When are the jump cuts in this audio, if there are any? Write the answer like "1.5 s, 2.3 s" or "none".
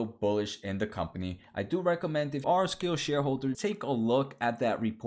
2.4 s, 3.5 s